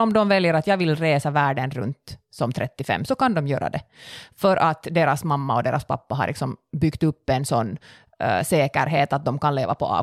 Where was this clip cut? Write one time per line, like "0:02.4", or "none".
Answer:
none